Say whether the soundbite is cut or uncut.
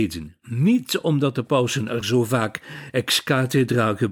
uncut